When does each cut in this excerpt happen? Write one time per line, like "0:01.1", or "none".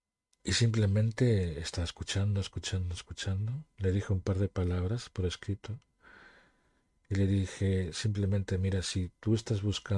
none